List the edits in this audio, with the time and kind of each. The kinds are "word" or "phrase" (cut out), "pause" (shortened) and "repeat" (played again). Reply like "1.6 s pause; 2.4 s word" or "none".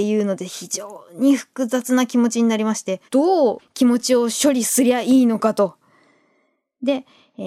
3.1 s pause